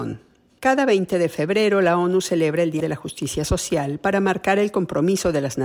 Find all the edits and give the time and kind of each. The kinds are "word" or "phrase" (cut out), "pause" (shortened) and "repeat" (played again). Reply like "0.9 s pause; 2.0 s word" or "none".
2.8 s word

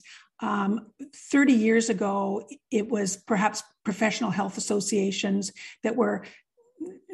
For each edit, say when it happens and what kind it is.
none

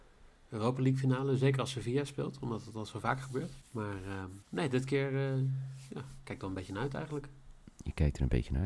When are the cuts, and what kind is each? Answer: 3.6 s pause; 4.4 s pause

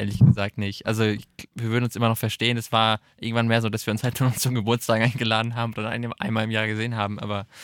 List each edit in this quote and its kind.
1.5 s pause

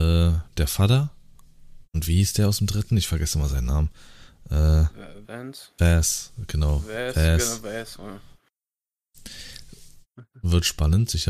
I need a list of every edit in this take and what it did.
1.8 s pause; 5.2 s word

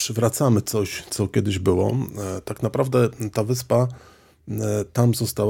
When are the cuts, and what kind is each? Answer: none

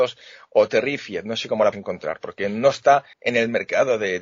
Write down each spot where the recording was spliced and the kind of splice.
1.7 s word; 3.1 s pause

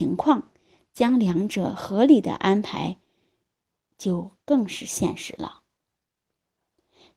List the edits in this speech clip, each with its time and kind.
none

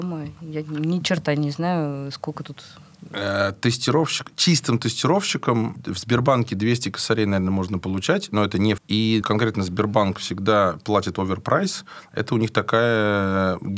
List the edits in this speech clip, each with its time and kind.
8.8 s word; 9.2 s phrase

